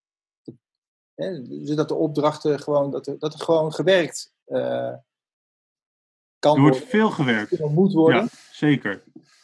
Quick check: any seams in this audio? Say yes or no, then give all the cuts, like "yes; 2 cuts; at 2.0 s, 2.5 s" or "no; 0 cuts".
yes; 1 cut; at 2.9 s